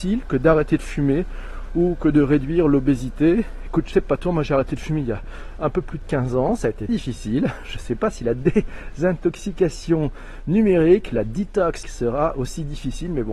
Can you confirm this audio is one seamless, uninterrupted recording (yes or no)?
no